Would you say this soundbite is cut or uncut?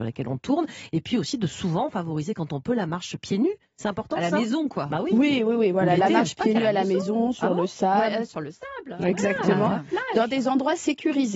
uncut